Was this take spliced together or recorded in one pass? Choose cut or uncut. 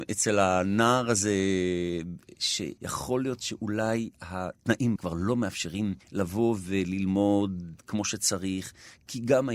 cut